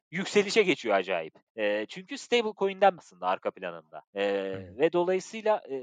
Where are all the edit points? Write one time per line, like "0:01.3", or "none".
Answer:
0:01.5
0:03.0
0:04.1